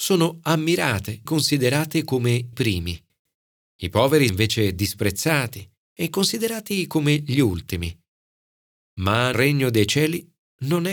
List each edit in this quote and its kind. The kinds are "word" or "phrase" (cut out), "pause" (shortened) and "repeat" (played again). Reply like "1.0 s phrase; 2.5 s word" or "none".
1.3 s word; 2.5 s word; 4.3 s word; 5.8 s word; 9.3 s word

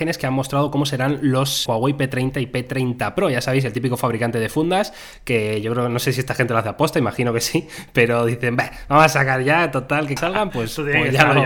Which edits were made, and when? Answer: 1.7 s word; 10.2 s phrase

